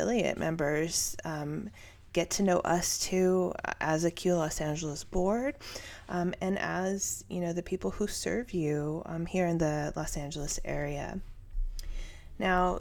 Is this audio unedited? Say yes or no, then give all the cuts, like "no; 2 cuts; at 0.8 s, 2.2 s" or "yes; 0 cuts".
yes; 0 cuts